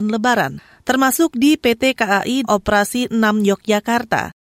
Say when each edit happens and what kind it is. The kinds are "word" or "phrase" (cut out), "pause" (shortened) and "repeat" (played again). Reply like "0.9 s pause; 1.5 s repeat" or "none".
2.4 s word